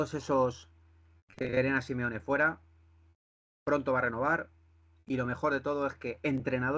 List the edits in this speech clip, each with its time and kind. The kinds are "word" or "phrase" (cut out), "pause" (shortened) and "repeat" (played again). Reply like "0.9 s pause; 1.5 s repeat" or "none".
none